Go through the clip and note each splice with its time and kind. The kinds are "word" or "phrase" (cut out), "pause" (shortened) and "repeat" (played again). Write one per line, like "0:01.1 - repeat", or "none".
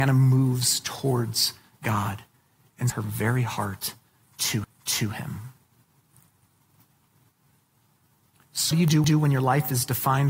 0:02.9 - word
0:04.6 - repeat
0:08.7 - word
0:09.0 - repeat